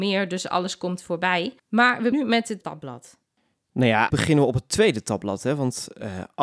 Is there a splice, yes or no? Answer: yes